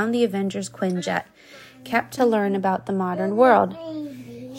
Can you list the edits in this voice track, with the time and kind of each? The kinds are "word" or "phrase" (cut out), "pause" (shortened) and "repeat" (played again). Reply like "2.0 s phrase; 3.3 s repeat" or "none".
2.2 s phrase